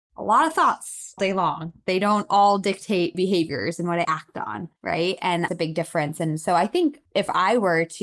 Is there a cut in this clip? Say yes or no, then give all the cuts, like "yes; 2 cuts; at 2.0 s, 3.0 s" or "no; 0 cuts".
yes; 6 cuts; at 1.2 s, 3.1 s, 4.0 s, 4.8 s, 5.5 s, 7.1 s